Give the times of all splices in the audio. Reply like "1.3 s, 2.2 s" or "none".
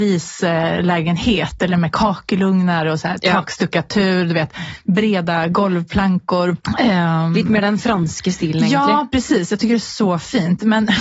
6.6 s